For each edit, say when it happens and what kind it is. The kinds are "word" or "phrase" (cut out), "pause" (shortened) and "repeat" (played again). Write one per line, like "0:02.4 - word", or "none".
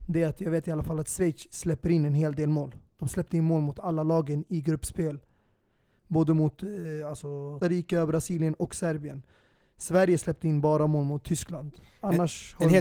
0:07.6 - word